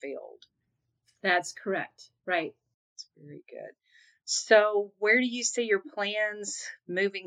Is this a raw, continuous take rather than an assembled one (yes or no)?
yes